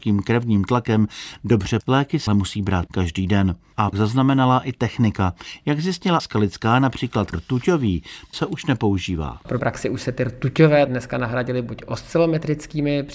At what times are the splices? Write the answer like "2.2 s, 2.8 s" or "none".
1.8 s, 2.3 s, 2.9 s, 3.9 s, 6.2 s, 7.3 s, 8.3 s, 9.6 s, 10.9 s